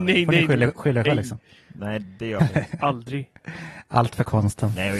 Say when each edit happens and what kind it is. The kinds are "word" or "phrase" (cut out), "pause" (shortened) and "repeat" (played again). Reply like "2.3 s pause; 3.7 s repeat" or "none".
1.0 s word; 2.0 s word; 2.4 s word; 3.4 s pause